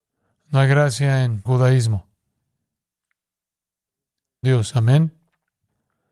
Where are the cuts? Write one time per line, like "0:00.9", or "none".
0:01.5
0:04.4